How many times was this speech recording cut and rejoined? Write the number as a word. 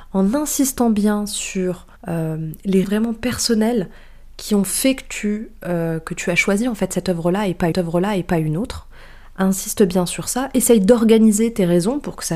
three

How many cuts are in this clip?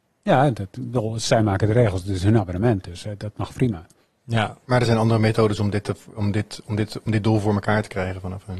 zero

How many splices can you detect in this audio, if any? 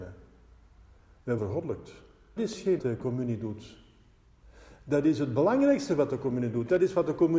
three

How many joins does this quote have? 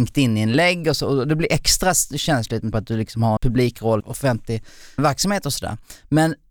four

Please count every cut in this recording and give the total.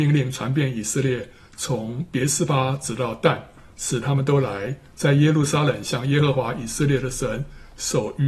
zero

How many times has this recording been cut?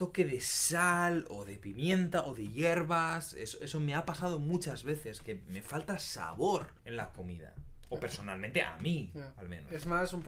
one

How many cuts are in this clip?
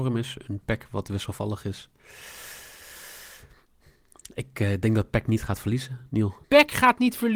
one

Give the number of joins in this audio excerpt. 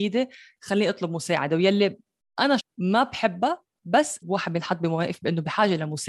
two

